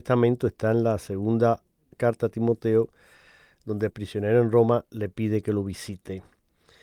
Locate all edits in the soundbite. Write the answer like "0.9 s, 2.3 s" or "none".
3.9 s